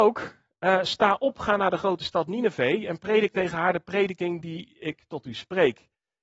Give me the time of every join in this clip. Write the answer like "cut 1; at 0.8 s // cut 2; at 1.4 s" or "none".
none